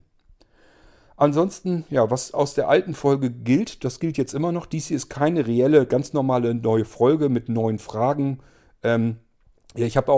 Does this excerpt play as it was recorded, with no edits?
yes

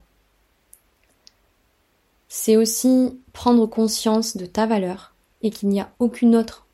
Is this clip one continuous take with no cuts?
no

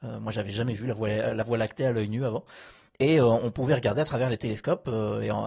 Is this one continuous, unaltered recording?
yes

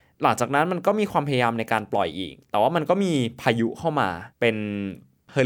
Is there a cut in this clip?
yes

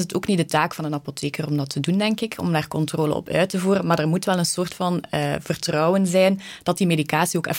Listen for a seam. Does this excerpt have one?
no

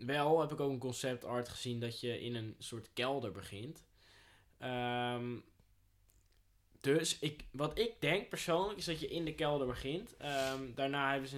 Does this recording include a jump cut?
no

